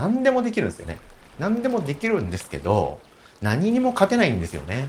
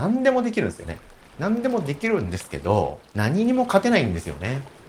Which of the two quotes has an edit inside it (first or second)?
second